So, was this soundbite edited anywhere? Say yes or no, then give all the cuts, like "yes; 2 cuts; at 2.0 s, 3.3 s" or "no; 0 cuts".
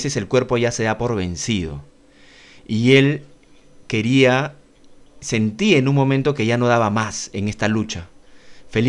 no; 0 cuts